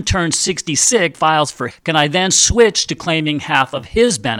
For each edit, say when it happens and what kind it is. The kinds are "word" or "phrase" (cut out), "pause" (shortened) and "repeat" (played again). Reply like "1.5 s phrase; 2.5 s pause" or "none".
1.1 s word; 1.7 s word

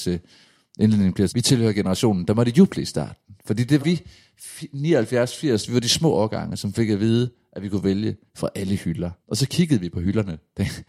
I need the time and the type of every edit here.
1.3 s word; 3.8 s word; 8.3 s word; 9.2 s pause

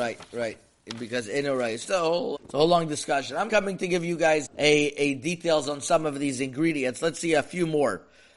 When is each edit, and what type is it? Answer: 1.8 s word; 2.4 s word; 3.5 s word; 4.5 s word

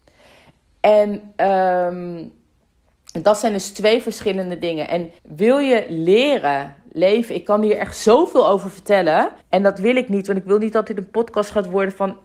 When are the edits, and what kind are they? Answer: 5.2 s pause; 9.4 s pause

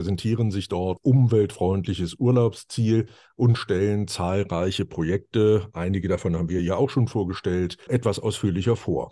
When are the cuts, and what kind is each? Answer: 1.0 s word; 6.6 s word; 7.9 s word

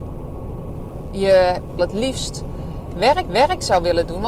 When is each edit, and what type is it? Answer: 1.8 s phrase; 3.2 s repeat

